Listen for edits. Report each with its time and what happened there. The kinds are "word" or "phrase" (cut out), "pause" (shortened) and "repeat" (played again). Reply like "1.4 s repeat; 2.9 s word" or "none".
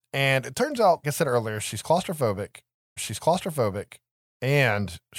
1.0 s word; 3.0 s repeat